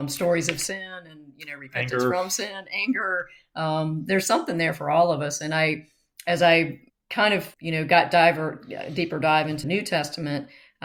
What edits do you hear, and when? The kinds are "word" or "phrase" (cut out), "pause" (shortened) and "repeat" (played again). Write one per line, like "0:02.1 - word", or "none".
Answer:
0:06.9 - pause
0:07.5 - pause
0:09.6 - word